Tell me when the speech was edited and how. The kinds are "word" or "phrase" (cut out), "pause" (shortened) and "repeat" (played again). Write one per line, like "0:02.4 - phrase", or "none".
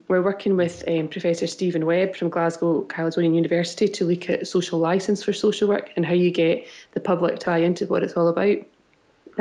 0:07.4 - word